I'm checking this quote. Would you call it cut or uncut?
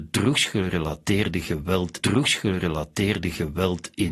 cut